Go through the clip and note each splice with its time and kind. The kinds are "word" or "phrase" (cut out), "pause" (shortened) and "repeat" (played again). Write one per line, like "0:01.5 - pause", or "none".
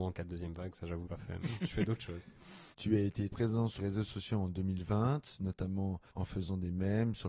0:01.0 - phrase
0:01.4 - word
0:02.7 - pause
0:03.3 - word
0:03.8 - word
0:06.1 - pause